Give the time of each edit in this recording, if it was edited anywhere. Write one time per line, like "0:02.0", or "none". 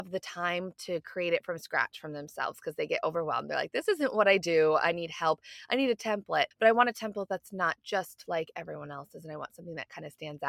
0:06.5